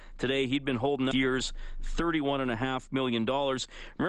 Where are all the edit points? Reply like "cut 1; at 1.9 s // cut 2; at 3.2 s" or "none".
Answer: cut 1; at 1.1 s